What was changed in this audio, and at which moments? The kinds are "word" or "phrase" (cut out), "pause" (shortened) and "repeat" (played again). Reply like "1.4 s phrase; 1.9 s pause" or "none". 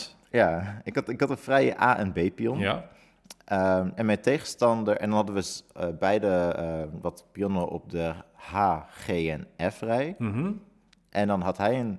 none